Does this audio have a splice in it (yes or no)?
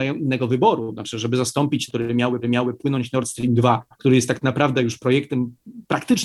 yes